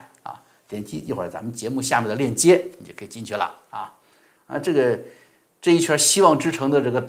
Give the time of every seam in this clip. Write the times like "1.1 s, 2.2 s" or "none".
none

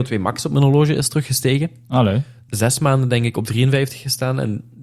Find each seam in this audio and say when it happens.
2.5 s

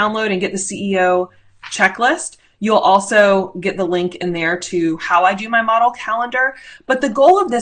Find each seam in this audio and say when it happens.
none

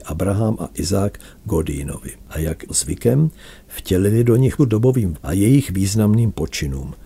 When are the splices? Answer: 2.2 s, 2.7 s, 4.6 s, 5.1 s

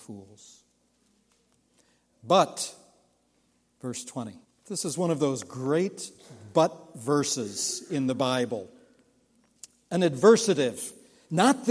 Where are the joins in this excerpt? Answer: 4.4 s

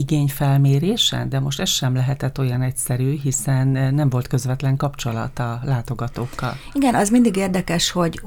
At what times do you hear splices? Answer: none

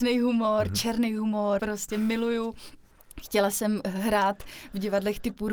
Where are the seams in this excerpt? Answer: 1.6 s

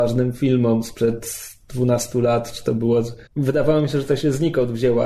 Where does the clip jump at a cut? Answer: 3.3 s

